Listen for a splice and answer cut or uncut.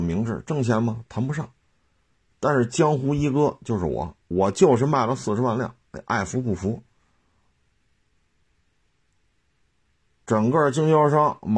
uncut